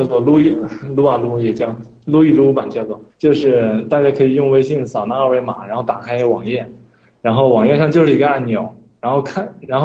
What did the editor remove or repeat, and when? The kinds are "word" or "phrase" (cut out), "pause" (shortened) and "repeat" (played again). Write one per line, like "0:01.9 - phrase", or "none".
0:03.1 - pause